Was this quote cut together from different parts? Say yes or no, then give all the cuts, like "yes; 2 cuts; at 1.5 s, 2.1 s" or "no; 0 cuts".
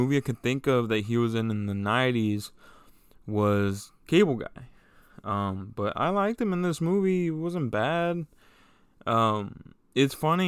no; 0 cuts